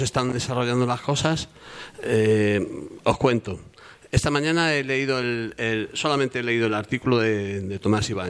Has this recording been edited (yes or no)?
no